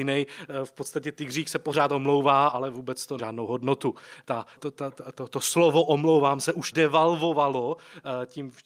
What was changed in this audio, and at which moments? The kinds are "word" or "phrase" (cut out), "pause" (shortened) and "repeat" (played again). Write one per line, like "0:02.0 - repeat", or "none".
0:03.2 - word
0:04.6 - word
0:06.7 - word